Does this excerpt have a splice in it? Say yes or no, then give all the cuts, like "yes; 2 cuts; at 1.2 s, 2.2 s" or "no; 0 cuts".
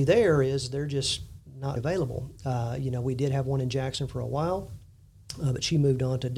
yes; 1 cut; at 1.8 s